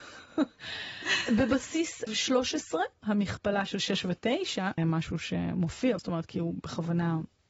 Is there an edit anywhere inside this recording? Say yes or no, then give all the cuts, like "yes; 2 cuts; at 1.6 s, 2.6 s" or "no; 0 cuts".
yes; 3 cuts; at 2.1 s, 4.8 s, 6.0 s